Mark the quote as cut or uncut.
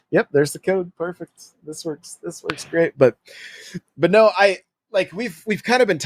uncut